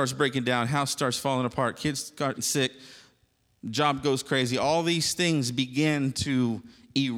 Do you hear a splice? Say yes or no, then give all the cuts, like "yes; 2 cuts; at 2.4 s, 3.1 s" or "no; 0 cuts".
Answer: yes; 1 cut; at 2.4 s